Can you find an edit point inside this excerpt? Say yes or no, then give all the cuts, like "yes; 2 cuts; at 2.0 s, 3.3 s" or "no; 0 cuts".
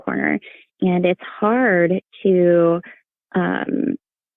no; 0 cuts